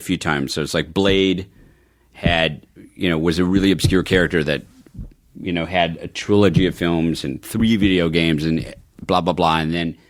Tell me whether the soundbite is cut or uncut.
uncut